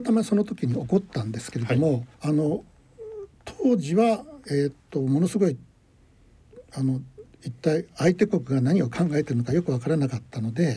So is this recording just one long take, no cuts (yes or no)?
no